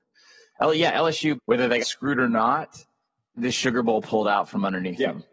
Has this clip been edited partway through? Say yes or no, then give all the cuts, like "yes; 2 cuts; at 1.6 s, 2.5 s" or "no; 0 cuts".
yes; 3 cuts; at 1.4 s, 1.8 s, 3.4 s